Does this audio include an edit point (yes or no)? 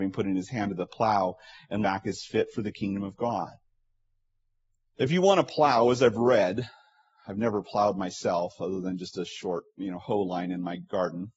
yes